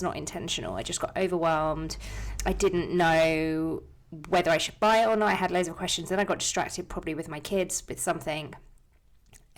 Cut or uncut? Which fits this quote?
uncut